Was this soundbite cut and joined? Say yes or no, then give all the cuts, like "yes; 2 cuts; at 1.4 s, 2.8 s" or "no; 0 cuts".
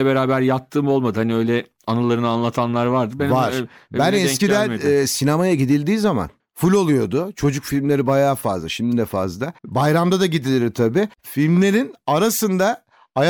yes; 3 cuts; at 6.4 s, 9.6 s, 11.1 s